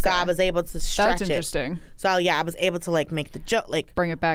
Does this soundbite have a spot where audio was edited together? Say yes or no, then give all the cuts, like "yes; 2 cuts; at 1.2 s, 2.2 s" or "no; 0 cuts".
no; 0 cuts